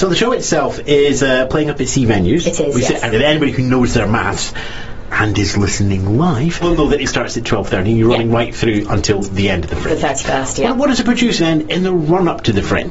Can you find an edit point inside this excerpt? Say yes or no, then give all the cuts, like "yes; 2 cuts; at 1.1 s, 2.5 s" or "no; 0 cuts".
yes; 3 cuts; at 3.1 s, 6.6 s, 11.4 s